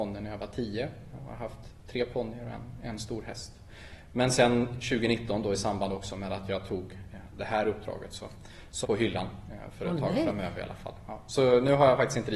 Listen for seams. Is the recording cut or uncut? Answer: cut